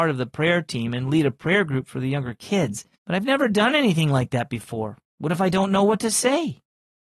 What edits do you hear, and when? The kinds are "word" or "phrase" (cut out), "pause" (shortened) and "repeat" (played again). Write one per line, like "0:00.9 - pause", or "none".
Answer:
0:02.9 - pause
0:05.1 - pause